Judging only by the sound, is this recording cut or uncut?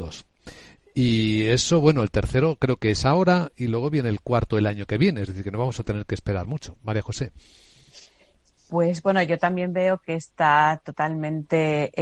uncut